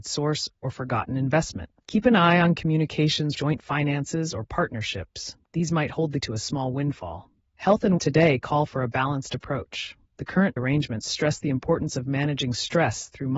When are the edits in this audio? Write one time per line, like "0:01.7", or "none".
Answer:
0:01.8
0:03.4
0:05.4
0:06.2
0:07.4
0:08.0
0:10.0
0:10.6